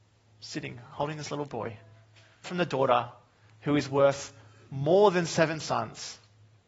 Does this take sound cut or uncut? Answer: cut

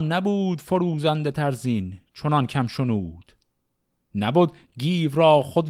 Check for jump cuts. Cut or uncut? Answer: uncut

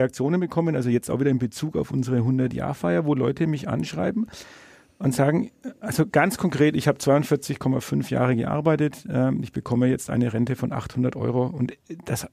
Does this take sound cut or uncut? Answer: uncut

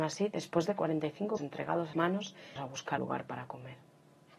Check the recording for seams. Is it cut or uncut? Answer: cut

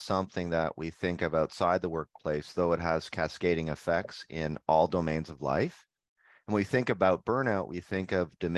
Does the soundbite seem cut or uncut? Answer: uncut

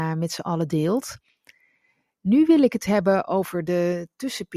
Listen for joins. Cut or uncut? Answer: uncut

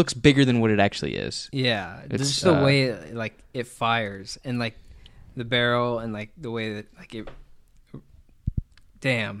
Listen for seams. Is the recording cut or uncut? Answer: uncut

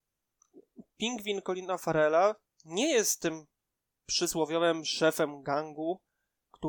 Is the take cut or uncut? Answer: uncut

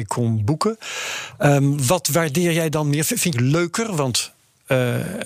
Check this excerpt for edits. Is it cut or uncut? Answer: cut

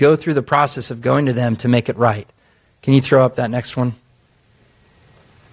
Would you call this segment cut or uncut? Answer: uncut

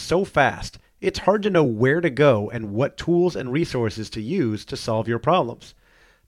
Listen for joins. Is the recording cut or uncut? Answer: uncut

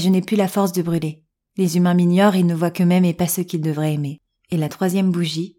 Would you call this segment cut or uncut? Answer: uncut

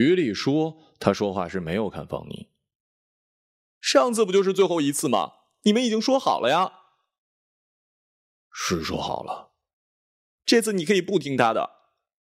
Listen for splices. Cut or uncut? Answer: uncut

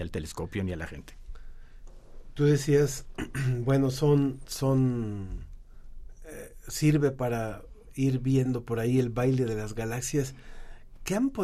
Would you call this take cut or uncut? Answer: uncut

